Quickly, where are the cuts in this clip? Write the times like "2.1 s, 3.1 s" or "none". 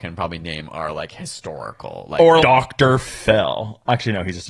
2.4 s